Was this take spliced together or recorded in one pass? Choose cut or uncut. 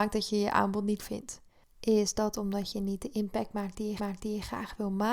cut